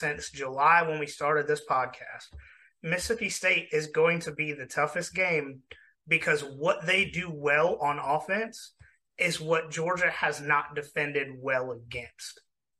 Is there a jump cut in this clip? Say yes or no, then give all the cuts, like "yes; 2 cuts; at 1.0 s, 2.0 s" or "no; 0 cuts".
no; 0 cuts